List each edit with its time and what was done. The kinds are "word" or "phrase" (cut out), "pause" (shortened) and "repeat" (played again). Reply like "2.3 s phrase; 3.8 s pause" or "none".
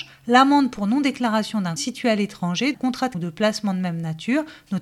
1.8 s word; 2.7 s word; 3.1 s word

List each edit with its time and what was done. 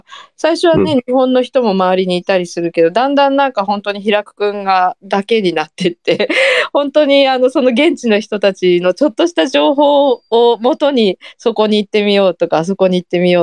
10.3 s pause

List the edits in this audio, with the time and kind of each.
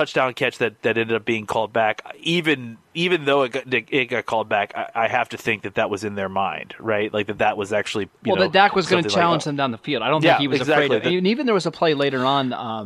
none

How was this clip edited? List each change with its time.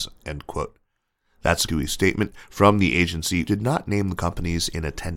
1.7 s word; 3.5 s word

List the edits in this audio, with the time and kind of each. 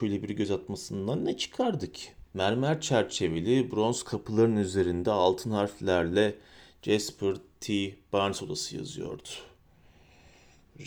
2.3 s pause

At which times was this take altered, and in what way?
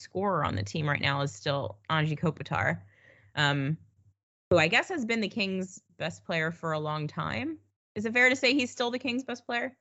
7.8 s pause

